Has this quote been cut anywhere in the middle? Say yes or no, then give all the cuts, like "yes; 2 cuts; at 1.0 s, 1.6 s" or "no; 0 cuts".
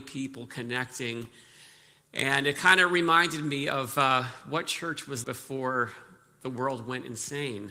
yes; 1 cut; at 5.2 s